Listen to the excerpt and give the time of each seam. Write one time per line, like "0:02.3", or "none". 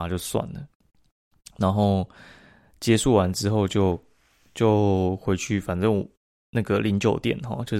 none

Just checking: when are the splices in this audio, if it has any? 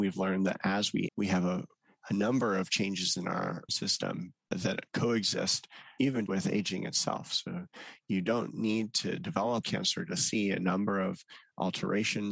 0:01.1
0:03.7
0:04.9
0:06.3
0:09.6

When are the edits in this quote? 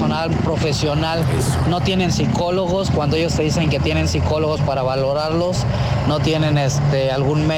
none

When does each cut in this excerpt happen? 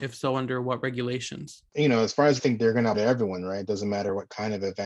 0:01.7
0:02.4
0:02.9

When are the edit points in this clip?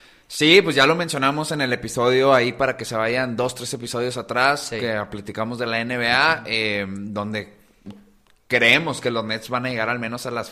none

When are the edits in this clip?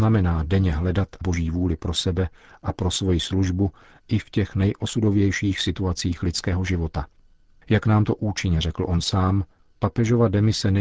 0:01.2

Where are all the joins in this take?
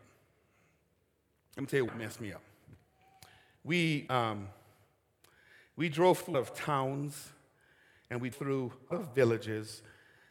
0:01.9
0:04.1
0:06.3
0:08.3
0:08.9

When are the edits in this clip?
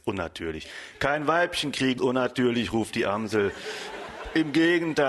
0:02.0

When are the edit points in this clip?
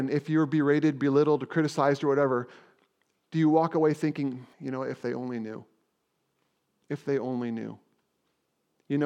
0:04.5

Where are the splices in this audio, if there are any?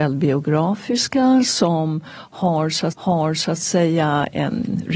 0:02.9

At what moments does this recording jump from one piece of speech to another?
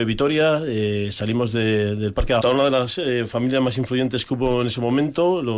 0:02.4

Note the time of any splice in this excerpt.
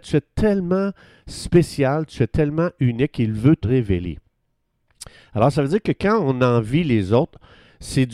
0:03.6

